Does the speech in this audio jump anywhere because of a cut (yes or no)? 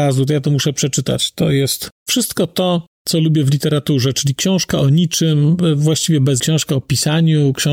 yes